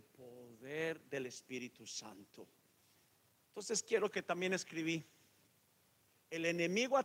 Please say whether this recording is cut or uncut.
cut